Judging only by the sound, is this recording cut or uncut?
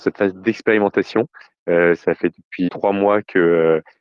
cut